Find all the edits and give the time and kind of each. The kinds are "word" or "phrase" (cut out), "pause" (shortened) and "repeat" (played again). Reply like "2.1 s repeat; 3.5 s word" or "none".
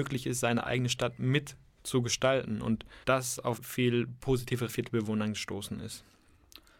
3.0 s pause; 3.6 s word; 4.7 s phrase